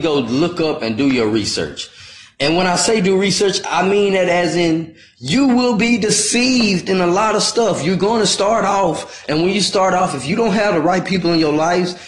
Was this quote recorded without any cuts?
yes; 0 cuts

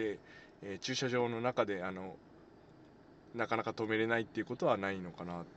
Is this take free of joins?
yes; 0 cuts

